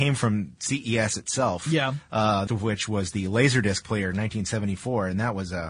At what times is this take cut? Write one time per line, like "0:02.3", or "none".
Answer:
0:02.5

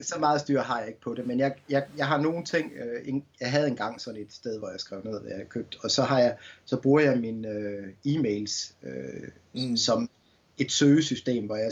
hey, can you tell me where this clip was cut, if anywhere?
none

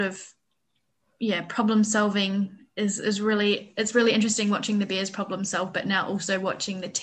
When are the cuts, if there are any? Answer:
none

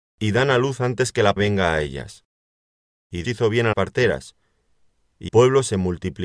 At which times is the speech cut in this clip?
0:01.4
0:03.2
0:03.7
0:05.3

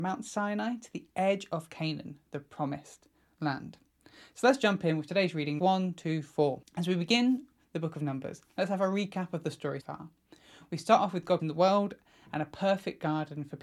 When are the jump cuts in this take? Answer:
0:05.6
0:09.8
0:11.4

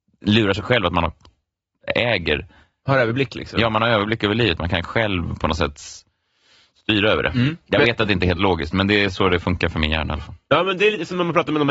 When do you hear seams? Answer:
none

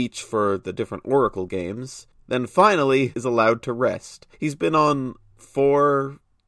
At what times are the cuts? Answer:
0:02.1
0:03.1
0:04.3
0:05.3

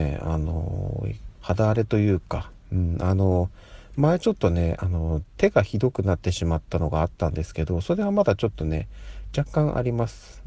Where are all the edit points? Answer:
0:01.3

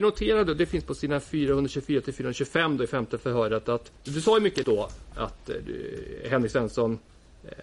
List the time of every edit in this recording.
0:04.0
0:04.6

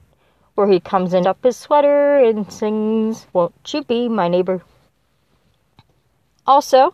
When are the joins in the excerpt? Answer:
0:01.2
0:03.3

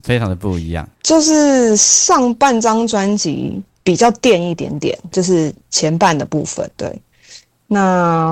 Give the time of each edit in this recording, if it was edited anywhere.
0:00.9
0:03.7
0:05.1
0:06.8

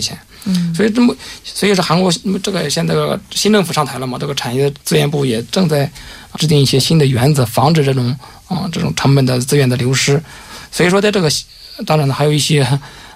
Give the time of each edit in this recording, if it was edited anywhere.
0:04.8
0:06.3

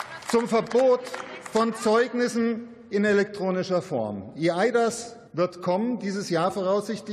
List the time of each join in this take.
0:05.3

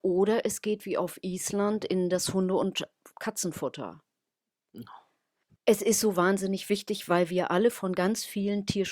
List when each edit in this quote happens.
none

